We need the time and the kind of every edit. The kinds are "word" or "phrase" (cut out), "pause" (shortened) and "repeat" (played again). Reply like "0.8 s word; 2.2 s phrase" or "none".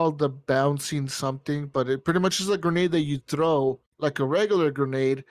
3.9 s pause